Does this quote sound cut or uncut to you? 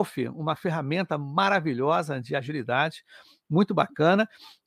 uncut